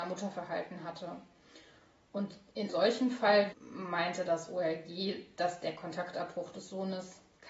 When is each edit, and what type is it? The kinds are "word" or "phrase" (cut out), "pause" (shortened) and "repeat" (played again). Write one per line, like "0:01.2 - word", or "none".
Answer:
0:02.7 - word
0:03.5 - word